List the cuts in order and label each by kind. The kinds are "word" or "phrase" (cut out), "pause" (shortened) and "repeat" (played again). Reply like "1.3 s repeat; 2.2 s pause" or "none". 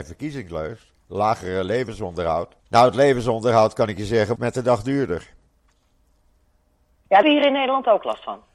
2.6 s pause; 4.4 s word; 7.2 s word